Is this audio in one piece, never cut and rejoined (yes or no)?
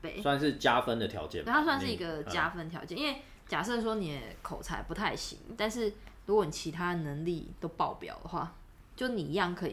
yes